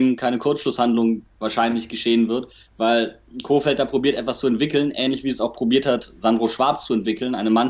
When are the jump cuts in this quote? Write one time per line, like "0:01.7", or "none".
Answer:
none